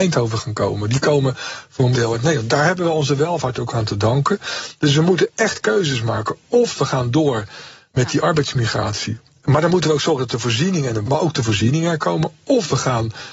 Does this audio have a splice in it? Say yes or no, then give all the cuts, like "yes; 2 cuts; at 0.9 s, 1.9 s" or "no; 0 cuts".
yes; 2 cuts; at 1.9 s, 11.0 s